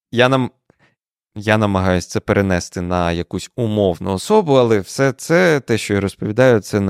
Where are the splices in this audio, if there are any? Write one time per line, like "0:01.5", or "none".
none